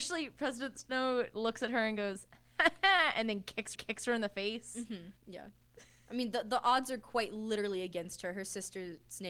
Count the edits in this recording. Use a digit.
2